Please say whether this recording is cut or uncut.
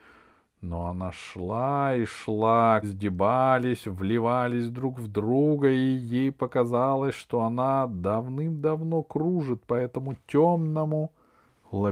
cut